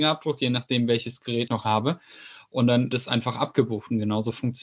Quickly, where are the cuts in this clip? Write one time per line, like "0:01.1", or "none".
0:01.5
0:02.9